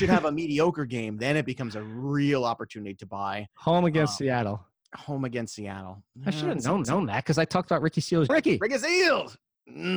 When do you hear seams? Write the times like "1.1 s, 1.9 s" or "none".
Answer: 4.8 s, 6.8 s, 8.3 s